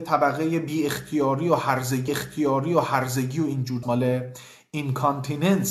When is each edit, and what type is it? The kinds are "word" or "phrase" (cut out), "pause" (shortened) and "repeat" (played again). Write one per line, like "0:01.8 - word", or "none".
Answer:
0:02.1 - repeat
0:03.8 - word